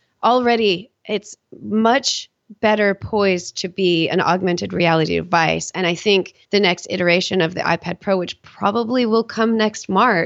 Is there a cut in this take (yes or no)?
yes